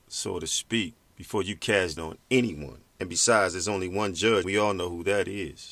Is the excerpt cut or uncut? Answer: cut